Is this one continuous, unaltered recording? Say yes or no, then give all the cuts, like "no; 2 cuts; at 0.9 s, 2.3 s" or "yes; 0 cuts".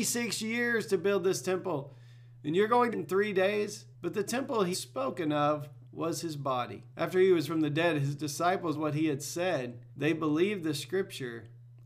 no; 8 cuts; at 2.9 s, 3.9 s, 4.7 s, 5.8 s, 6.9 s, 7.5 s, 8.7 s, 9.9 s